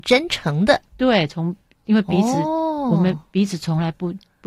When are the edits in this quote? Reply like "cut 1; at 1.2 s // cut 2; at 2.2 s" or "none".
none